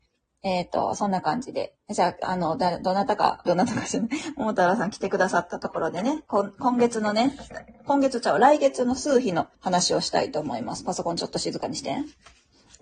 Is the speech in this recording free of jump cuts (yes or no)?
no